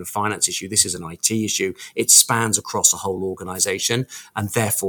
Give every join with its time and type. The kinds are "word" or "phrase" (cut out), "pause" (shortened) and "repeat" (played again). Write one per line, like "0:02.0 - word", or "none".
none